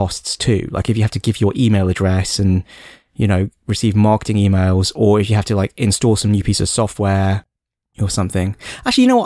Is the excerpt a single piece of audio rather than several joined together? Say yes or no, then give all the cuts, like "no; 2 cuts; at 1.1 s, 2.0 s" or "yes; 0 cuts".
yes; 0 cuts